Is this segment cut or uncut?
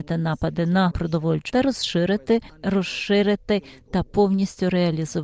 cut